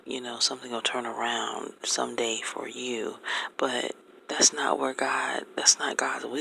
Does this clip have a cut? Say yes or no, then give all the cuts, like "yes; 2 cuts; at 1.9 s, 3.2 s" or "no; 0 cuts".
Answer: no; 0 cuts